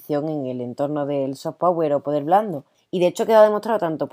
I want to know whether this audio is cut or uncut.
uncut